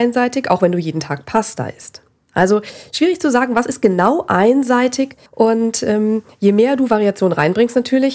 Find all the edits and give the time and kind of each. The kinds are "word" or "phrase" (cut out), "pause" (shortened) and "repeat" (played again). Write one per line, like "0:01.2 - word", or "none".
0:05.3 - pause